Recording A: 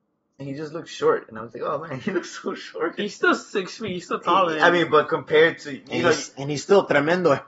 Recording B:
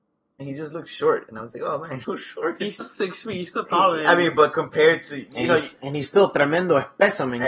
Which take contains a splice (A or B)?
B